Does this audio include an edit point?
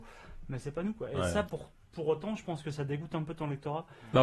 no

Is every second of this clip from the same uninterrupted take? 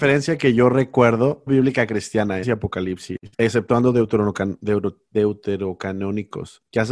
no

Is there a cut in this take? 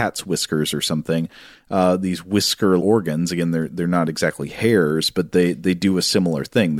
yes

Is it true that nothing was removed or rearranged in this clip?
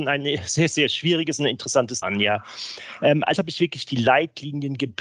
no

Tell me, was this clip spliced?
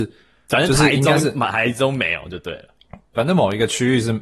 yes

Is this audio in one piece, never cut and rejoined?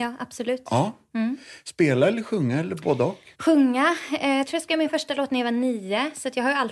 no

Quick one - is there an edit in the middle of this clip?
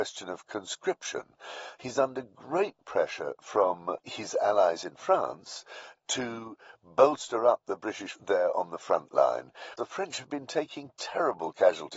yes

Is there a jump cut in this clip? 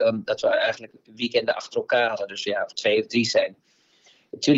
yes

